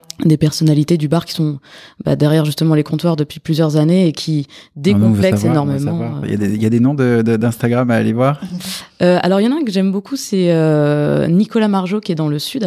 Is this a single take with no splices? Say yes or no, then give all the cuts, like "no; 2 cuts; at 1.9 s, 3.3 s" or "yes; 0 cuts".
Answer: yes; 0 cuts